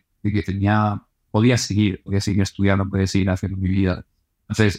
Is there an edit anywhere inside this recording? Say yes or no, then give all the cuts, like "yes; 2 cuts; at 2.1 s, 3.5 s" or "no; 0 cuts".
no; 0 cuts